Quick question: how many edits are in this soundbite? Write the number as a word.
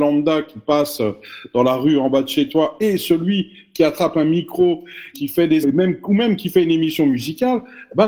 two